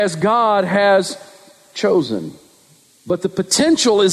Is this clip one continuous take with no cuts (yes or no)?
yes